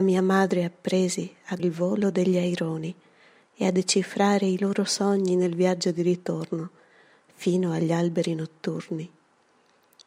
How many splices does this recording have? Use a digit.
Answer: 1